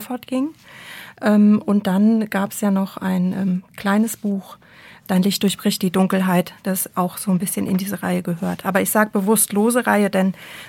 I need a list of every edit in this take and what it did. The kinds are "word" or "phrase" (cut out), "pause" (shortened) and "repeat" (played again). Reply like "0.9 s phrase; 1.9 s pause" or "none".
none